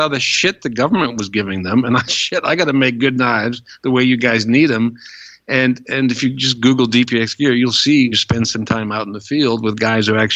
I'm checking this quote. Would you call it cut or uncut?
cut